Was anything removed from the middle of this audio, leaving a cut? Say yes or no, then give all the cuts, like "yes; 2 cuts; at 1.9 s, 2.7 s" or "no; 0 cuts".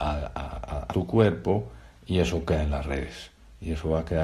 yes; 1 cut; at 0.9 s